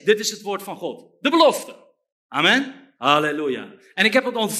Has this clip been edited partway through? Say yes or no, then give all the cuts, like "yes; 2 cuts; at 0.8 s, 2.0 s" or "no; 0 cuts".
yes; 1 cut; at 3.0 s